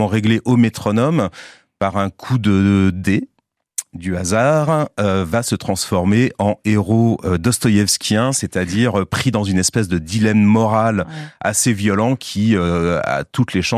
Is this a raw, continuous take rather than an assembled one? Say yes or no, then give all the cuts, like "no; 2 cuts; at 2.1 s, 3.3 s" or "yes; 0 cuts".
yes; 0 cuts